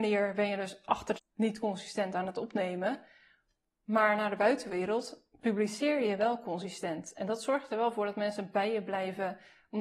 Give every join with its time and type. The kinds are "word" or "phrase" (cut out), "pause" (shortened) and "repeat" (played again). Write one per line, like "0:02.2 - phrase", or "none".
0:01.2 - word